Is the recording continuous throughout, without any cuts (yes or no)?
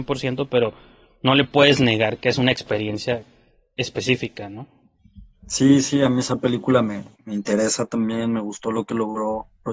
yes